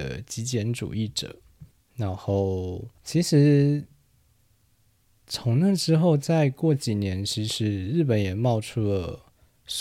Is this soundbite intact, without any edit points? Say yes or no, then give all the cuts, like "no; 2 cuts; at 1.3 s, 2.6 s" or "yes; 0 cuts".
no; 2 cuts; at 1.7 s, 3.0 s